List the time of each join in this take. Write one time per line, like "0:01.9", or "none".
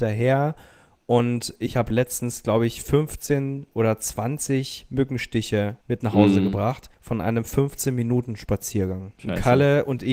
0:05.8
0:06.9
0:09.2